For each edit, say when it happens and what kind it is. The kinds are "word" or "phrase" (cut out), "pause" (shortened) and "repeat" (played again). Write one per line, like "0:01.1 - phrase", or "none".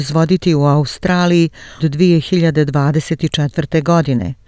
0:01.8 - word